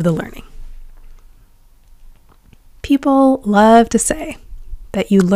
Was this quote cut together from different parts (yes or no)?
no